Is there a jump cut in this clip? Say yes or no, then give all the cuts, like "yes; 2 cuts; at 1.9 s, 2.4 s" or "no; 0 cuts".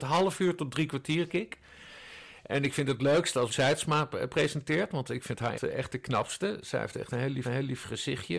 yes; 4 cuts; at 1.3 s, 3.5 s, 5.5 s, 7.4 s